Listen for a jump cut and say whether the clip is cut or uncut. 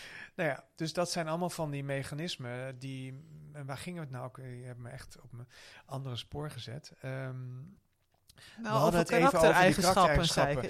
uncut